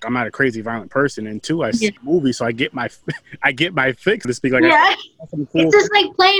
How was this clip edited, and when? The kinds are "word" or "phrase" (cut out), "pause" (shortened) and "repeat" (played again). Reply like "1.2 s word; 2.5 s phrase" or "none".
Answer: 2.0 s pause; 4.2 s word